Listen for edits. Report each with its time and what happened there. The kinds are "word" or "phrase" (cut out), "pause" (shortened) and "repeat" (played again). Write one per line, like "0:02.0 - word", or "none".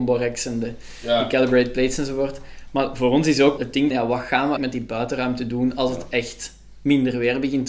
0:03.6 - word
0:03.9 - word
0:04.6 - word